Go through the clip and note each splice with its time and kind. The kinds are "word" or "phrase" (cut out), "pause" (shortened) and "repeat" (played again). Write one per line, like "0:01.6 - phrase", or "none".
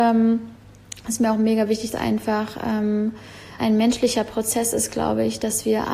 0:01.9 - phrase
0:03.6 - word